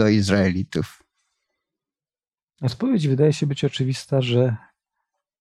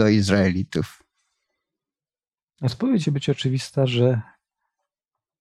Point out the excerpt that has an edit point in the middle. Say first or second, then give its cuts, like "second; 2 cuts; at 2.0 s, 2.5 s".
second; 1 cut; at 3.0 s